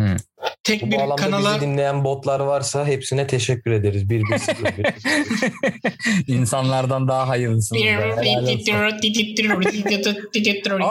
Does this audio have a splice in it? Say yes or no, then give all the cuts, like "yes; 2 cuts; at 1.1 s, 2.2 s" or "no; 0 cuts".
no; 0 cuts